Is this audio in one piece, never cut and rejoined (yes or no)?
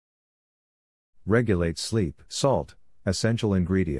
no